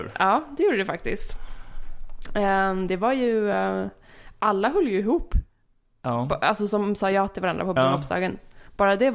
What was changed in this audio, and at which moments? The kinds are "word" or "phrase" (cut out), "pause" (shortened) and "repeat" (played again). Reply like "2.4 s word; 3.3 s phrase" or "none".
none